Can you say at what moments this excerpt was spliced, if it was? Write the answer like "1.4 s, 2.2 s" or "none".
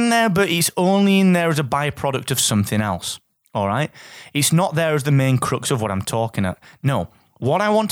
none